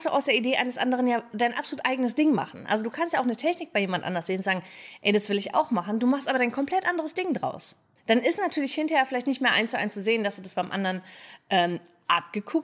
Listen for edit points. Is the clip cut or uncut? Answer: cut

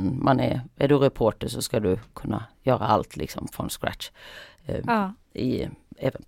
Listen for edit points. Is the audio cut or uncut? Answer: uncut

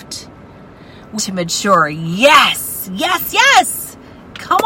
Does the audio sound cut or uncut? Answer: cut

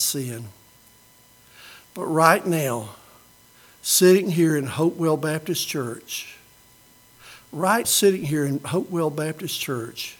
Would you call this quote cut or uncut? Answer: cut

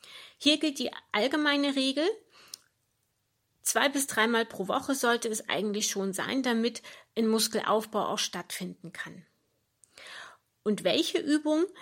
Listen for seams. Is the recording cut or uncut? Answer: uncut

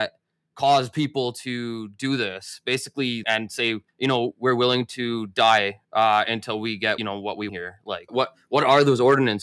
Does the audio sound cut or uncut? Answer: cut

